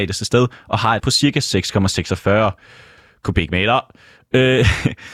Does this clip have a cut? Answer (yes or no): yes